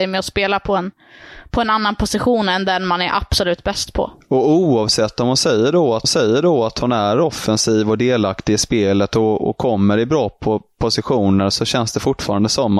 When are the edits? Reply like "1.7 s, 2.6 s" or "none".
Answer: 6.0 s